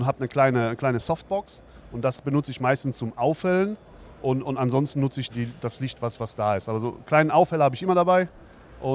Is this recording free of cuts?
no; 1 cut; at 5.3 s

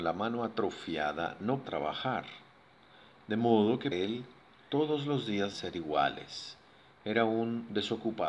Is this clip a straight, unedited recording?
no; 3 cuts; at 1.6 s, 3.9 s, 5.5 s

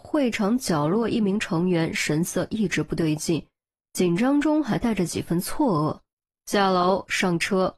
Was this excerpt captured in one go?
no; 1 cut; at 6.3 s

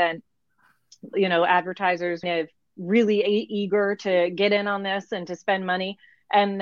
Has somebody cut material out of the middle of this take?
yes; 2 cuts; at 1.1 s, 2.2 s

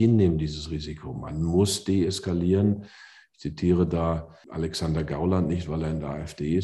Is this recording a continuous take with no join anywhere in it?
yes; 0 cuts

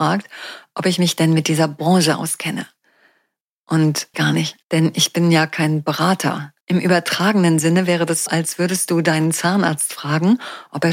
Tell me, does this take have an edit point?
yes; 4 cuts; at 4.1 s, 4.6 s, 6.6 s, 8.3 s

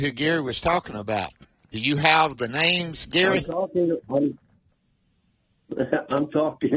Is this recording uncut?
yes; 0 cuts

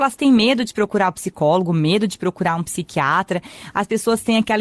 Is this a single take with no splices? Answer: yes; 0 cuts

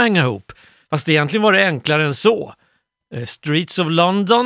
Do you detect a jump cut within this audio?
no; 0 cuts

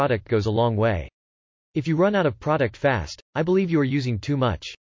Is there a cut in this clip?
no; 0 cuts

